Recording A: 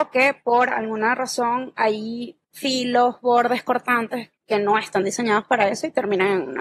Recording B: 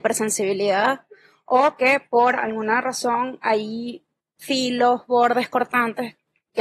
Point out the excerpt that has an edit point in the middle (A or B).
A